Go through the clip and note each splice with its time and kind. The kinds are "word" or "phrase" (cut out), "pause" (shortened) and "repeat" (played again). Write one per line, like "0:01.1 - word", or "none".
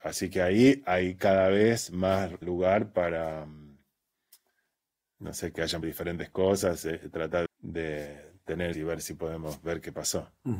0:02.4 - word
0:05.8 - word
0:07.5 - word
0:08.7 - word